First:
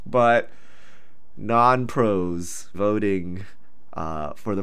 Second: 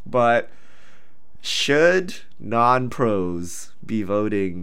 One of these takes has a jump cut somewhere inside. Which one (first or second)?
first